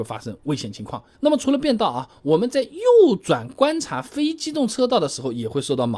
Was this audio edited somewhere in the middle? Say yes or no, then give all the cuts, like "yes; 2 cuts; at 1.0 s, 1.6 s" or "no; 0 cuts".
yes; 1 cut; at 1.1 s